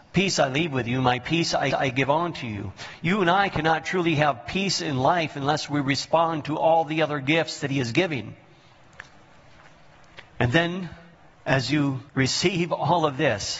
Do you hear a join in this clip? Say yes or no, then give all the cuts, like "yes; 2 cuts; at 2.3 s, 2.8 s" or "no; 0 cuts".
yes; 4 cuts; at 1.7 s, 10.3 s, 11.1 s, 12.1 s